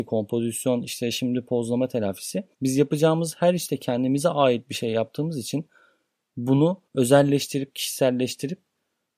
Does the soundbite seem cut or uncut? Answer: cut